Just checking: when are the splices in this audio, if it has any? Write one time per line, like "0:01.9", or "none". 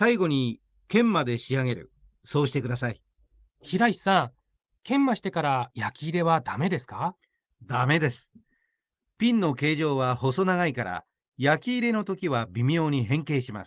none